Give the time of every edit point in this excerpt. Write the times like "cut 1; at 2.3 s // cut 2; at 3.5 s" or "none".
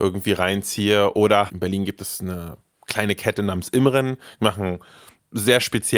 none

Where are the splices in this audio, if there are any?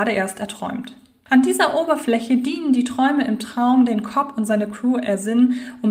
none

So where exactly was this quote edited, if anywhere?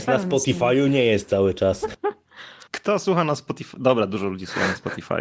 cut 1; at 2.7 s

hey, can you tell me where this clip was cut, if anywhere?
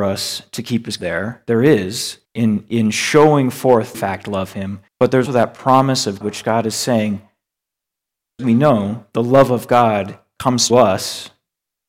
cut 1; at 1.0 s // cut 2; at 2.2 s // cut 3; at 3.9 s // cut 4; at 4.9 s // cut 5; at 5.3 s // cut 6; at 6.2 s // cut 7; at 8.4 s // cut 8; at 10.7 s

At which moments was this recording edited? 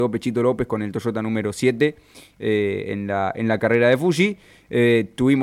none

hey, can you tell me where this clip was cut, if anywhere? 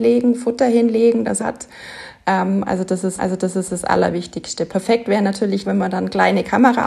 cut 1; at 1.4 s // cut 2; at 3.2 s // cut 3; at 5.6 s

